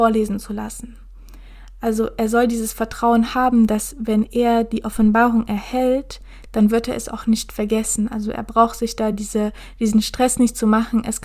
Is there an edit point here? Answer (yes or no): no